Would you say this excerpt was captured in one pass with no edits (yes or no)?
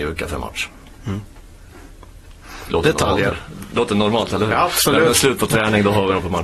yes